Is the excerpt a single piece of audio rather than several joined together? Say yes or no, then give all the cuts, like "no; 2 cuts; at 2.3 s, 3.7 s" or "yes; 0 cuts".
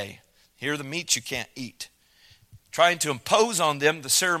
yes; 0 cuts